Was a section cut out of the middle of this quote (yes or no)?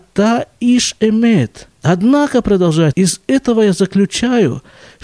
yes